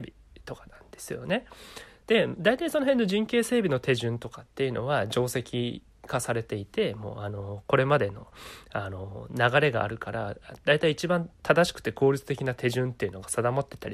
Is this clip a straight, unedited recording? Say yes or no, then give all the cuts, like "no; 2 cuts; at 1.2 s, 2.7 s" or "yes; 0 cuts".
no; 1 cut; at 11.3 s